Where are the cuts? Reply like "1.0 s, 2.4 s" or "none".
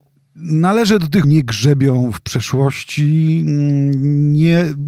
1.2 s